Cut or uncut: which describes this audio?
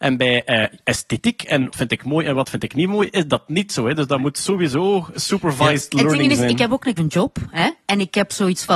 cut